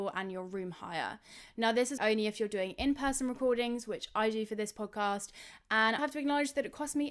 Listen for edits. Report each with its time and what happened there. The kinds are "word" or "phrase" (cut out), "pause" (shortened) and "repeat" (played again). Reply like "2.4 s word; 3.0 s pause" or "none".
2.0 s word; 6.0 s word